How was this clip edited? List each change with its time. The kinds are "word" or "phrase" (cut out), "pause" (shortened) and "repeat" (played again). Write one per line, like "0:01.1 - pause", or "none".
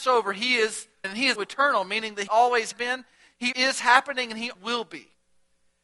0:01.0 - word
0:01.4 - word
0:02.3 - word
0:02.7 - word
0:03.5 - word
0:04.5 - word